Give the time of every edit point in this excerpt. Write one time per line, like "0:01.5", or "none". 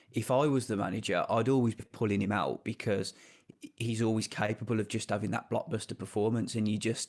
0:01.8